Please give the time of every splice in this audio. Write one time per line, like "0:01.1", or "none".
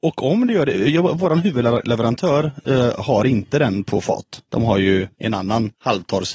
none